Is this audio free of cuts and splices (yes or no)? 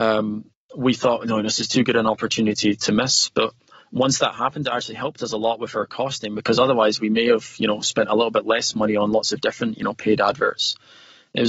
yes